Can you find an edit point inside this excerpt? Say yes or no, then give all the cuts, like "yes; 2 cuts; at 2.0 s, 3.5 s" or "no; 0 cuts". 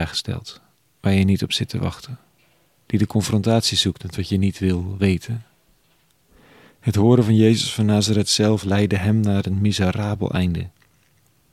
no; 0 cuts